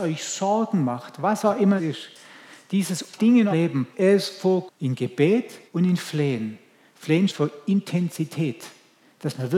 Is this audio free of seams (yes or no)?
no